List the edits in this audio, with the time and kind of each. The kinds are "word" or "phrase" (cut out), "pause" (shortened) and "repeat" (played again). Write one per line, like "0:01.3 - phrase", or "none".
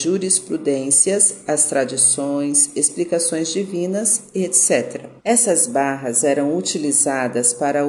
0:05.2 - pause